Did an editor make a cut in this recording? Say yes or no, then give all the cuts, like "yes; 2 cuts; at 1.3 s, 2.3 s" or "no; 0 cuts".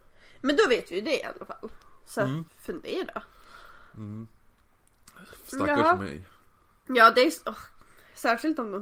yes; 1 cut; at 2.5 s